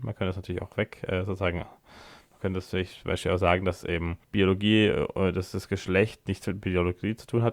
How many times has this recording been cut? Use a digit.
1